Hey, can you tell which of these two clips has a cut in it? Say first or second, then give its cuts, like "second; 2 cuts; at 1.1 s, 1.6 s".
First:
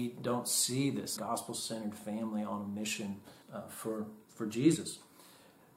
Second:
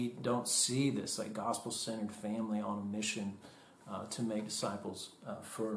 first; 2 cuts; at 1.2 s, 3.4 s